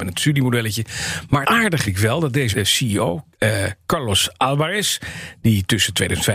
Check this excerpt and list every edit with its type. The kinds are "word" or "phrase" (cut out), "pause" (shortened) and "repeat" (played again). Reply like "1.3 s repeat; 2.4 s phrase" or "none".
1.4 s word; 1.8 s word; 2.5 s word; 3.3 s pause